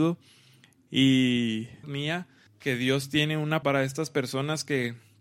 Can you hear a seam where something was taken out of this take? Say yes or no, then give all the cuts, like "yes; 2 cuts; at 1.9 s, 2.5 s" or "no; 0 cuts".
yes; 3 cuts; at 1.8 s, 2.5 s, 3.6 s